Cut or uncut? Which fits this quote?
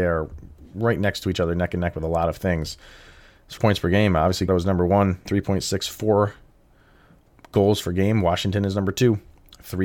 cut